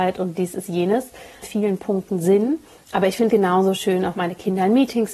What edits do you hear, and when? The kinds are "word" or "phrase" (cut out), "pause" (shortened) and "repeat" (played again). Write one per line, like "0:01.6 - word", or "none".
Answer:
0:01.4 - phrase
0:03.3 - word